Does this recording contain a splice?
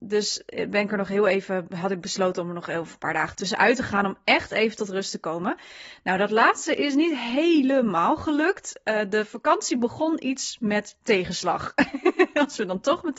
no; 0 cuts

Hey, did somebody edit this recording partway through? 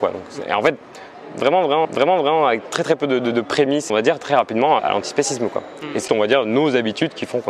yes; 5 cuts; at 1.8 s, 3.9 s, 4.2 s, 4.8 s, 6.1 s

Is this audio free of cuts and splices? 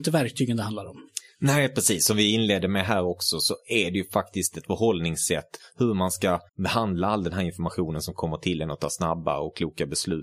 no; 1 cut; at 6.5 s

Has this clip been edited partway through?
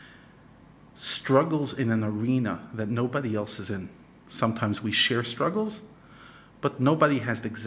no; 0 cuts

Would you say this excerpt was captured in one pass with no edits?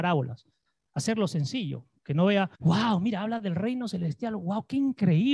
no; 1 cut; at 2.6 s

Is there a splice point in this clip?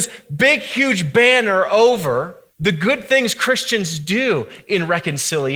yes; 1 cut; at 2.5 s

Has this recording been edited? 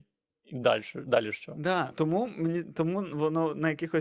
yes; 1 cut; at 1.9 s

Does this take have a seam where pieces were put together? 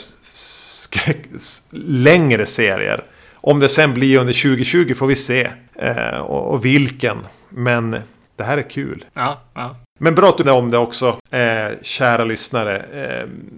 yes; 1 cut; at 10.4 s

